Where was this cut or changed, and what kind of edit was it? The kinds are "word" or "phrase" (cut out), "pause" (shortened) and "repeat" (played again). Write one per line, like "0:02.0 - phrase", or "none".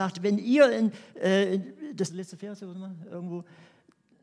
0:02.1 - phrase